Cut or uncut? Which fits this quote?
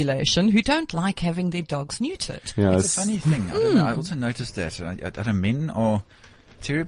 uncut